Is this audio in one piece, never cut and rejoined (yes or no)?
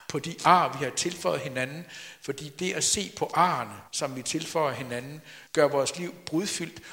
no